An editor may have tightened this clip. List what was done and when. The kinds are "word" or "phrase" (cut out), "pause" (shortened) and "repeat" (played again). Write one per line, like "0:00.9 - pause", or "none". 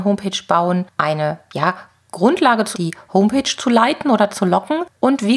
0:01.0 - word
0:02.7 - phrase